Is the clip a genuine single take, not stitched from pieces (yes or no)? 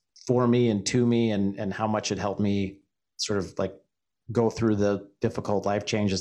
yes